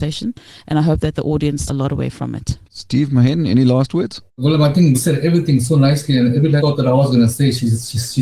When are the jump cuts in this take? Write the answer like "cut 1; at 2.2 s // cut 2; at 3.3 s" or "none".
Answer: cut 1; at 1.7 s // cut 2; at 2.6 s // cut 3; at 4.3 s // cut 4; at 4.9 s // cut 5; at 6.6 s